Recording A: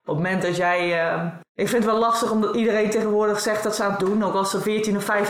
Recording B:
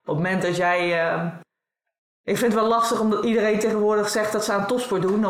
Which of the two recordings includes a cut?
A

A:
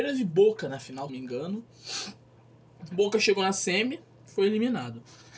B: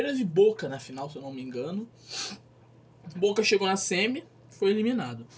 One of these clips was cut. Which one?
A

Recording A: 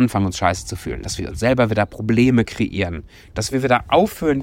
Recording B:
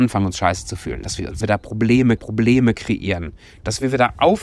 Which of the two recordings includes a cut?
B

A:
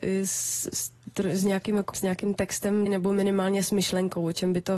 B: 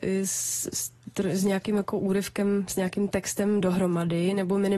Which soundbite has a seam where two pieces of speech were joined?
A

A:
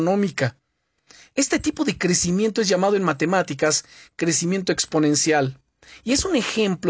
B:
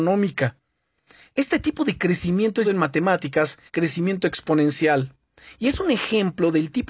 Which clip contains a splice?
B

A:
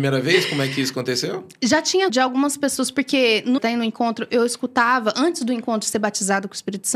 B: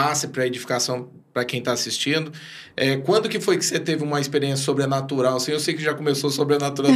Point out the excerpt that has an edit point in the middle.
A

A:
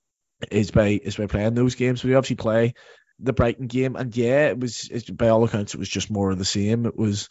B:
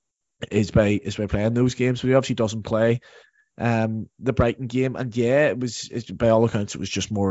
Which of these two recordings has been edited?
A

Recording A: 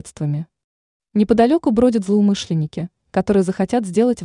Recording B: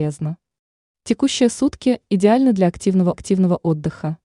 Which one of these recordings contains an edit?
B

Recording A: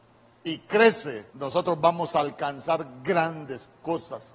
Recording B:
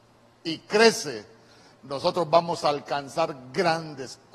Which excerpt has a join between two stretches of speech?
A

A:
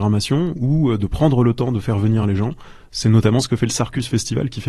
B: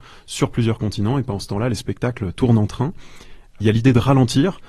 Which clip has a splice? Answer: B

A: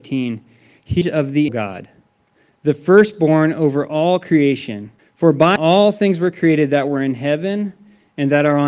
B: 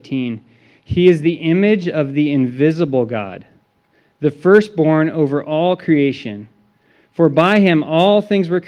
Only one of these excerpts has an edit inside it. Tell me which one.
A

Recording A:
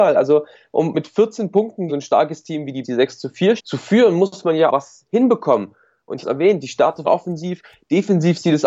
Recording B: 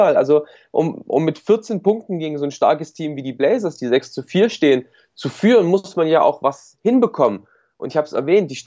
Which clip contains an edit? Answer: A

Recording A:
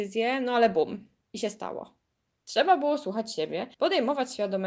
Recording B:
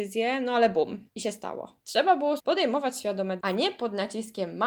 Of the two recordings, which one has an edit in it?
B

